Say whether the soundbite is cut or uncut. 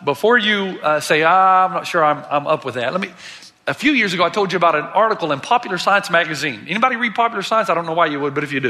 uncut